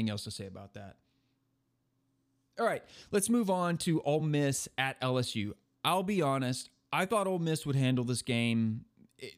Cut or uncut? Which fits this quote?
uncut